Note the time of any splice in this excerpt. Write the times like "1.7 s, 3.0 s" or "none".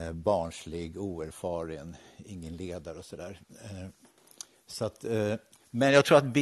none